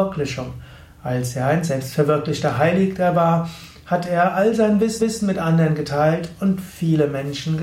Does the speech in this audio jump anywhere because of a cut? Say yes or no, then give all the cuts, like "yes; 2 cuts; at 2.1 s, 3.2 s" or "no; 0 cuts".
yes; 1 cut; at 5.0 s